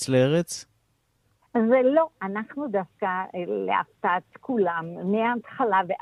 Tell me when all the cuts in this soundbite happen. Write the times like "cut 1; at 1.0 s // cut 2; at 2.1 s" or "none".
none